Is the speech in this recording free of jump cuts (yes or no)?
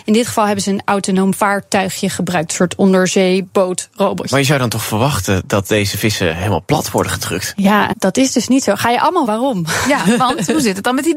no